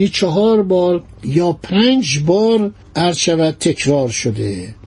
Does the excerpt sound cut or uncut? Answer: cut